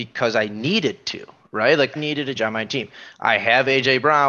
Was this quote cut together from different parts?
yes; 2 cuts; at 2.0 s, 2.4 s

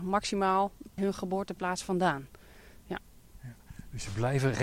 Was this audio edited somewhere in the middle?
yes; 1 cut; at 1.0 s

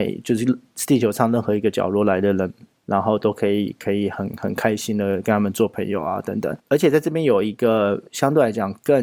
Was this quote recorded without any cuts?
no; 1 cut; at 8.1 s

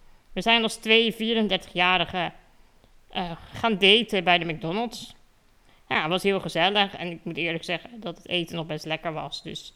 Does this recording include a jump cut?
no; 0 cuts

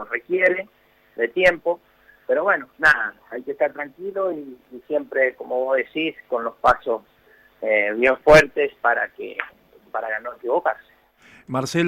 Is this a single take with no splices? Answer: yes; 0 cuts

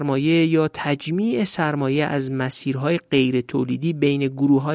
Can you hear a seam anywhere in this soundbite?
no; 0 cuts

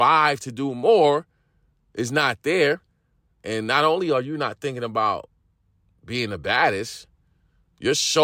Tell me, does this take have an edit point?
no; 0 cuts

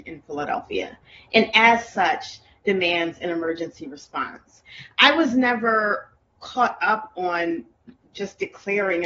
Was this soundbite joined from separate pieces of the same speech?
no; 0 cuts

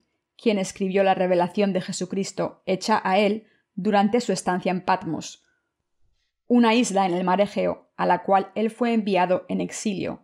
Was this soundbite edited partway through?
no; 0 cuts

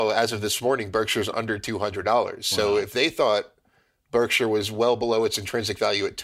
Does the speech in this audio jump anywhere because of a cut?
no; 0 cuts

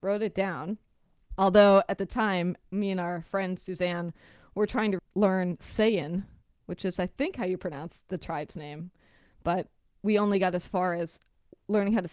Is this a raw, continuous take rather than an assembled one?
yes; 0 cuts

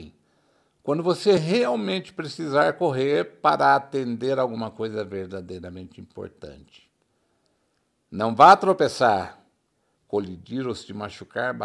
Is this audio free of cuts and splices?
yes; 0 cuts

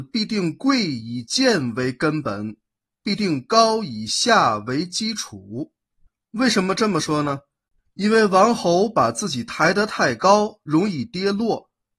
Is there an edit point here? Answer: no; 0 cuts

